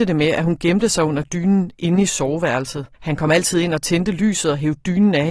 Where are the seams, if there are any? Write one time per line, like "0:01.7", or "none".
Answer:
0:02.9